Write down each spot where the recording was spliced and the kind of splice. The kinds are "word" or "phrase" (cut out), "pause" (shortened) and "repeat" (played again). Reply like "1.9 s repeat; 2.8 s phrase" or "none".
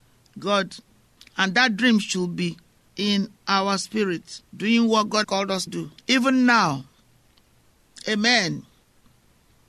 2.9 s word; 4.5 s pause; 5.2 s word; 5.7 s word; 6.0 s pause